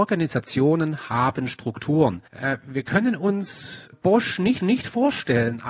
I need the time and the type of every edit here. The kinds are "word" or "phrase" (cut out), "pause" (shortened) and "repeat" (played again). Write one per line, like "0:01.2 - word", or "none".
0:02.3 - pause
0:03.9 - word
0:04.6 - repeat